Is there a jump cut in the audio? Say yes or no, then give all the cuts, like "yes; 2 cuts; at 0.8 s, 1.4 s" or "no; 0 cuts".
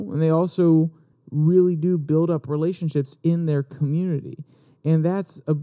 no; 0 cuts